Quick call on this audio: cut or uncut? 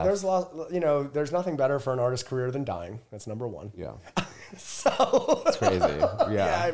uncut